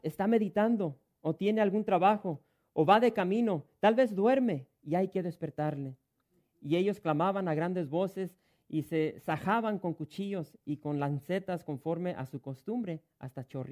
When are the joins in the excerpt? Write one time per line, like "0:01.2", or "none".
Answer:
none